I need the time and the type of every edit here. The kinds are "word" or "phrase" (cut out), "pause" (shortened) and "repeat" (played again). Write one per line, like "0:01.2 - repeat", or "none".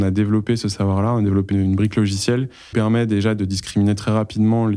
0:01.5 - word
0:02.7 - word